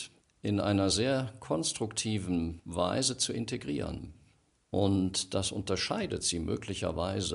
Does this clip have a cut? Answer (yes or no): no